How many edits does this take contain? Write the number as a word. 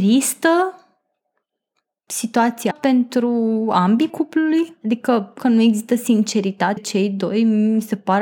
four